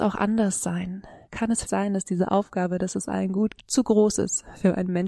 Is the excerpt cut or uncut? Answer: cut